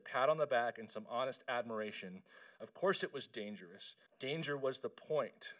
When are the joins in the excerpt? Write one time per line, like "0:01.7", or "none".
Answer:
0:04.1